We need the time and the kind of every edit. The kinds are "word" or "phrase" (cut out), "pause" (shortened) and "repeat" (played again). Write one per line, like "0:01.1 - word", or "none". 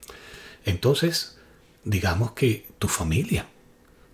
none